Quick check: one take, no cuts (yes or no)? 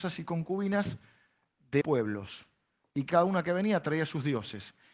no